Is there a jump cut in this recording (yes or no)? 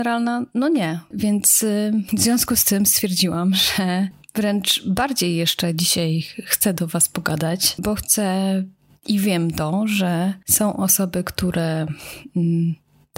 no